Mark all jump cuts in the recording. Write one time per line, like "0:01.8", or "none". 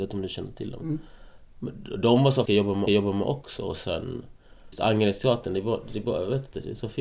0:02.5
0:02.9
0:04.7